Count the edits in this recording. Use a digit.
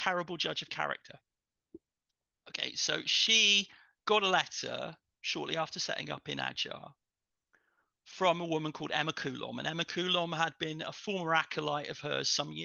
0